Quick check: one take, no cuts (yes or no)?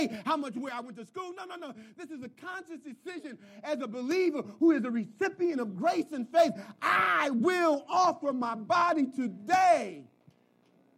yes